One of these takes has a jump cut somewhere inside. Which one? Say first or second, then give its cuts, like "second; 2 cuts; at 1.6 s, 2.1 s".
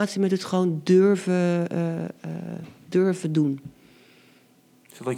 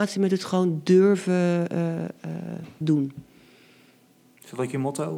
second; 1 cut; at 2.8 s